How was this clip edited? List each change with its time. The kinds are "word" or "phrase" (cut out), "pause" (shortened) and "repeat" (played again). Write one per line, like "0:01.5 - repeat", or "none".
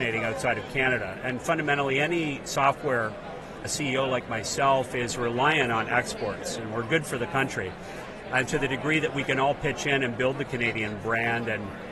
0:03.6 - word
0:08.5 - word